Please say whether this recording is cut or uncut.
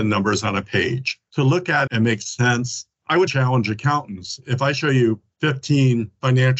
cut